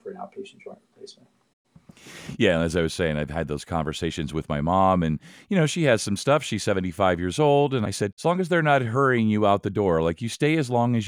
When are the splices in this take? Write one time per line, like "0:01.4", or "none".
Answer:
none